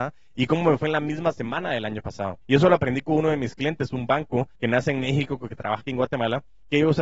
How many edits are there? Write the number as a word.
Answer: two